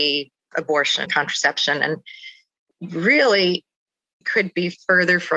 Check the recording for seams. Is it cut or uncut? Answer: cut